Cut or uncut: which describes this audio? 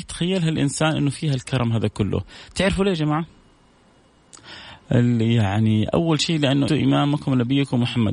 cut